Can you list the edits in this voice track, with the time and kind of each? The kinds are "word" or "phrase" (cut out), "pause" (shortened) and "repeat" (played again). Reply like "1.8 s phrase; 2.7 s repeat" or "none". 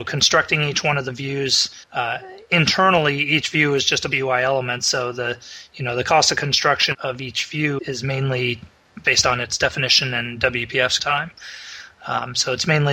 1.8 s pause; 4.1 s word; 6.9 s word; 7.8 s word; 9.0 s word; 11.0 s word